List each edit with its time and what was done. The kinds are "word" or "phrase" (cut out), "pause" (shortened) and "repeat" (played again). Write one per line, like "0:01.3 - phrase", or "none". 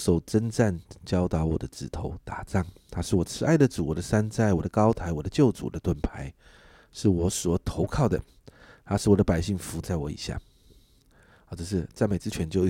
none

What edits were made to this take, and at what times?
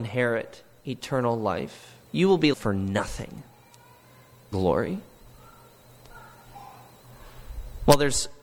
0:02.0 - pause
0:02.5 - word
0:04.5 - word

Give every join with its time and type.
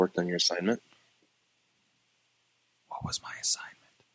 none

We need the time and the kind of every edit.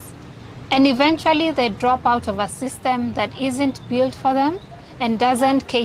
none

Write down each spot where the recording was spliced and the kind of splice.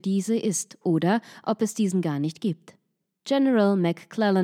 none

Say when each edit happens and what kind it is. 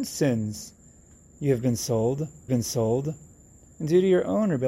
0:02.5 - repeat

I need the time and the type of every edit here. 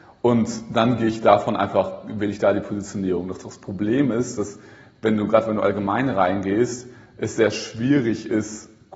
none

